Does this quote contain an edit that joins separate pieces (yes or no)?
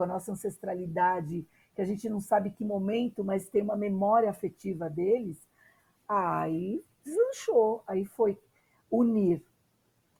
no